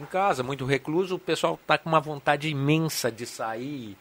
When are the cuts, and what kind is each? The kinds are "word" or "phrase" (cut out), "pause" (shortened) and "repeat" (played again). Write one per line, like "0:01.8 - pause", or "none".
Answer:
none